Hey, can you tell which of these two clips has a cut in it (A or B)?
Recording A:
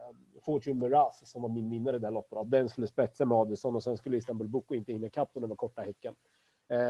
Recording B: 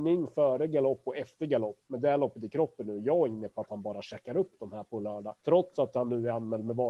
B